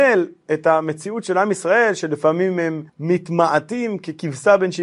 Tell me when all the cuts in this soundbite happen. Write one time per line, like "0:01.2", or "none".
0:02.9